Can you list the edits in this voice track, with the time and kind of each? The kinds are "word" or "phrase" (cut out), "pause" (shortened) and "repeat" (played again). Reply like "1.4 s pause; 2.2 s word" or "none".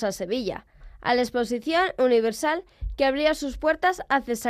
none